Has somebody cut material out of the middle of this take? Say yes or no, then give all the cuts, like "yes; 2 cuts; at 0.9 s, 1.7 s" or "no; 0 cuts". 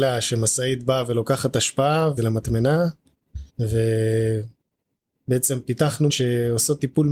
yes; 3 cuts; at 2.2 s, 3.5 s, 6.1 s